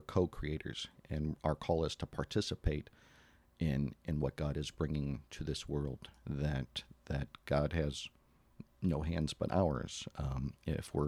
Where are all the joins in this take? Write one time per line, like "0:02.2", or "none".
0:01.0